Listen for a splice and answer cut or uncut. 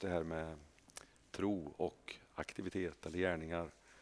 uncut